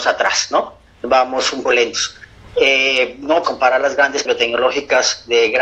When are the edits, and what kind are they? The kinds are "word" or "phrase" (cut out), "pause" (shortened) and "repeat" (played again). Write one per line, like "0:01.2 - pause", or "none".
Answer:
0:01.7 - word
0:03.4 - word
0:04.3 - word

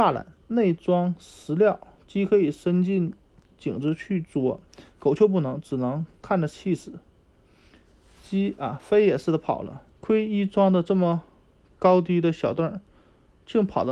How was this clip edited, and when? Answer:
0:09.9 - pause

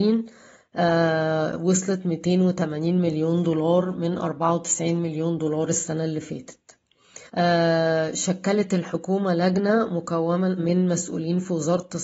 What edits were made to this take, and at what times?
0:07.3 - pause
0:10.6 - word

